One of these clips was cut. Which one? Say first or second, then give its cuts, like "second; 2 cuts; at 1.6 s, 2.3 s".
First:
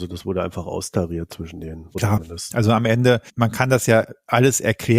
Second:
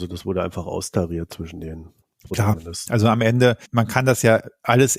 first; 1 cut; at 1.9 s